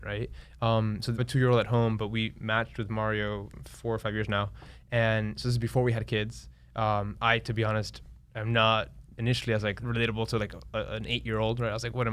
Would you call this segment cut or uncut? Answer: cut